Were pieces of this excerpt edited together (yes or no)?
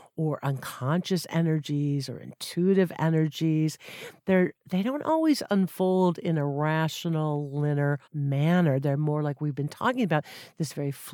yes